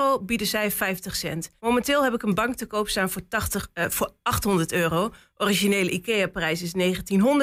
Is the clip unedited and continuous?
no; 1 cut; at 1.6 s

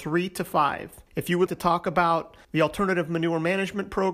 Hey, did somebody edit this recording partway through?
yes; 3 cuts; at 1.1 s, 1.5 s, 2.4 s

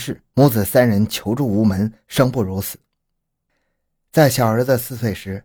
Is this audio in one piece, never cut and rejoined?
yes; 0 cuts

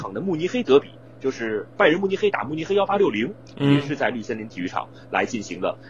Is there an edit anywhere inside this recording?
no; 0 cuts

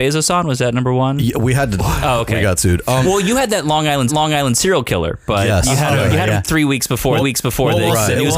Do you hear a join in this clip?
yes; 5 cuts; at 1.8 s, 4.1 s, 6.1 s, 6.4 s, 7.2 s

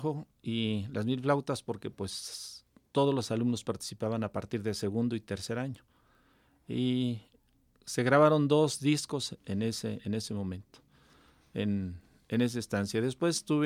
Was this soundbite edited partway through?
no; 0 cuts

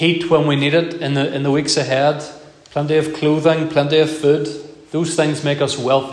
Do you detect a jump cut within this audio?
no; 0 cuts

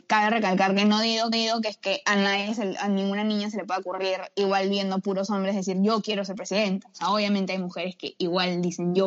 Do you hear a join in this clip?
yes; 1 cut; at 1.3 s

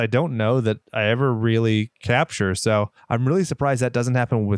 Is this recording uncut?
yes; 0 cuts

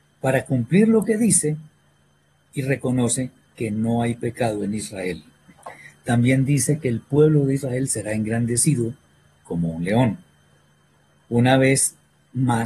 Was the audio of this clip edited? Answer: no; 0 cuts

